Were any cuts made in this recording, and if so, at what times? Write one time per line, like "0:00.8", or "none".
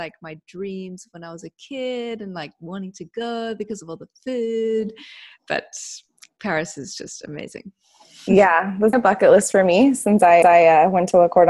0:08.9
0:10.4